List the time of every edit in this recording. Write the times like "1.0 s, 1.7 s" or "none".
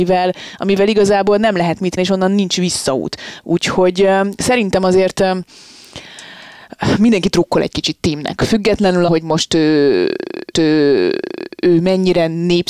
2.0 s, 9.1 s, 10.5 s